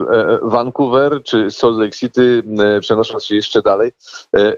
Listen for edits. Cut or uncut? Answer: uncut